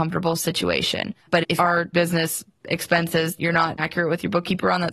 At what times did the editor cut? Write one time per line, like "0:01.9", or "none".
0:01.2
0:01.6
0:01.9
0:03.4
0:03.8